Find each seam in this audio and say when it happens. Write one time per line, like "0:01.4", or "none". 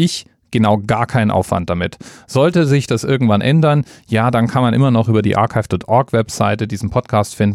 none